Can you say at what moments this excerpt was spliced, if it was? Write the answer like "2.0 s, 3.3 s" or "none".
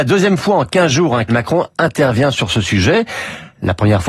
1.3 s